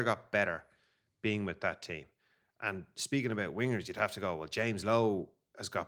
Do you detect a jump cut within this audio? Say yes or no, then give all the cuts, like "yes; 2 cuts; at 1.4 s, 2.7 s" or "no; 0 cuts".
no; 0 cuts